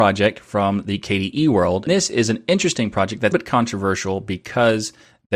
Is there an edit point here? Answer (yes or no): yes